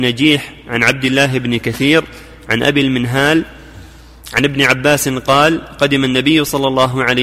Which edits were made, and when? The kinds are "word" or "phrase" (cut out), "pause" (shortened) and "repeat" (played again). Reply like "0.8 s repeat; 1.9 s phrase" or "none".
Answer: none